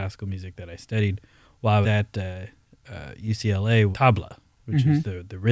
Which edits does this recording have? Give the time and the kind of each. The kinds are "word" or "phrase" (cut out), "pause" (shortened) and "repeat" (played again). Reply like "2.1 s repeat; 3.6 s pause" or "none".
1.8 s word; 3.9 s word